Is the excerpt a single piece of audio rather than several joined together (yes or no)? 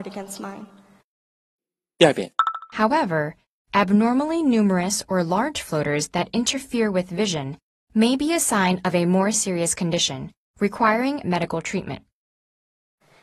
no